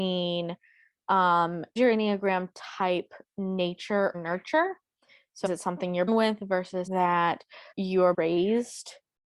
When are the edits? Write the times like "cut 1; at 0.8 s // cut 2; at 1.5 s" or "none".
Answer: cut 1; at 1.8 s // cut 2; at 4.1 s // cut 3; at 5.5 s // cut 4; at 6.1 s // cut 5; at 6.9 s // cut 6; at 7.7 s // cut 7; at 8.1 s